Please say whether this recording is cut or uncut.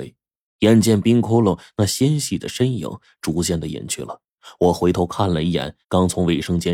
cut